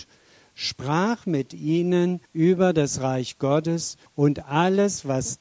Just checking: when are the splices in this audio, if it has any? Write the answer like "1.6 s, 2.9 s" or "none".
2.3 s, 4.1 s